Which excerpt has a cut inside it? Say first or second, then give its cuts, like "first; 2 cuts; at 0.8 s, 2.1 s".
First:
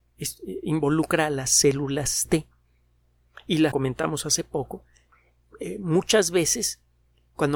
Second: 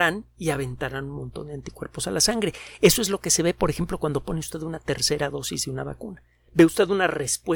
first; 1 cut; at 3.7 s